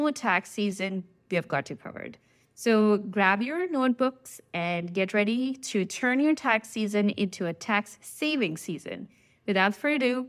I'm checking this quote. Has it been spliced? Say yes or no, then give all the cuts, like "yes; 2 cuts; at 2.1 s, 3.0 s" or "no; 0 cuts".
no; 0 cuts